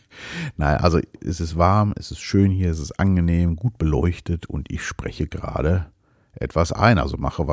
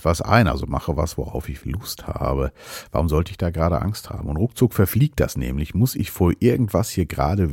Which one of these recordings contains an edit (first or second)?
second